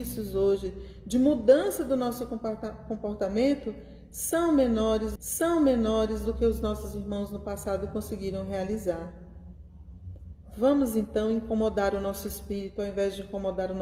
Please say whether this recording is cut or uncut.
cut